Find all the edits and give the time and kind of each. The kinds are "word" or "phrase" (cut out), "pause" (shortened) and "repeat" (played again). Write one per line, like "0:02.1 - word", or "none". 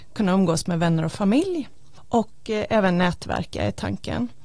none